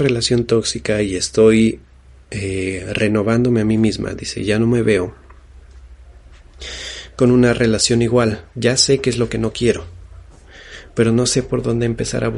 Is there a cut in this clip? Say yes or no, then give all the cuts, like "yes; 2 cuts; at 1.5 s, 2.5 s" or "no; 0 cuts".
no; 0 cuts